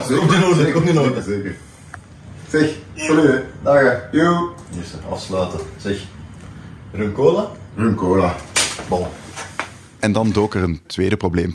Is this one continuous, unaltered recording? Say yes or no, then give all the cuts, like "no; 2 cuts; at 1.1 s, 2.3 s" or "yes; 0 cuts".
yes; 0 cuts